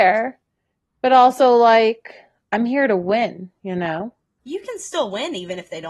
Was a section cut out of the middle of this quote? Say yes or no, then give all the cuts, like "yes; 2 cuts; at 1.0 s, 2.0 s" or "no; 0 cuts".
no; 0 cuts